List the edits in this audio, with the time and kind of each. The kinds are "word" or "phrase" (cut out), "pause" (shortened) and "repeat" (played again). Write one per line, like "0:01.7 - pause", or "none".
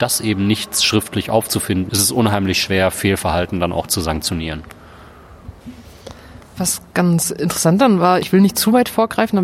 0:01.9 - word
0:08.2 - word